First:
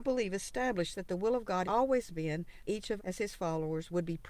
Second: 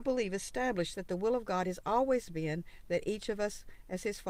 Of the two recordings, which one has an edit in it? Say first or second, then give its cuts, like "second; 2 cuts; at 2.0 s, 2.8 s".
first; 3 cuts; at 1.6 s, 2.7 s, 3.0 s